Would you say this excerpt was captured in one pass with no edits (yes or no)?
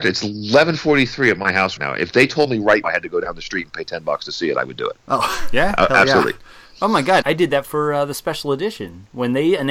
no